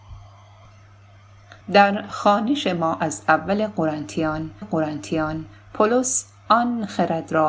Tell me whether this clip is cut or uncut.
cut